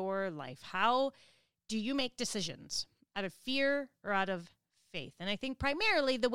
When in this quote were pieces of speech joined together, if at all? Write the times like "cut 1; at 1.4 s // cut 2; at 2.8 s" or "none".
none